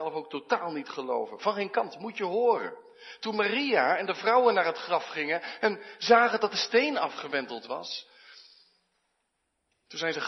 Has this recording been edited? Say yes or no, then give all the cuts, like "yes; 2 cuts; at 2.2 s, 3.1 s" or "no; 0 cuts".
no; 0 cuts